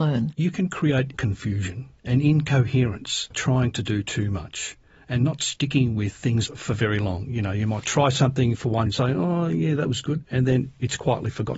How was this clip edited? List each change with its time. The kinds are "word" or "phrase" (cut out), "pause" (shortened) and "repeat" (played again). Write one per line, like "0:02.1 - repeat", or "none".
0:01.1 - word
0:03.3 - word
0:06.5 - word
0:08.9 - word